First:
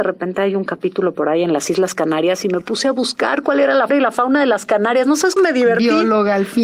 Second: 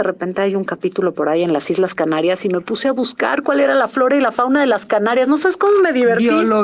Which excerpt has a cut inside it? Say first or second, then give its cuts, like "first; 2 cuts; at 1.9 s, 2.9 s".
first; 2 cuts; at 3.9 s, 5.4 s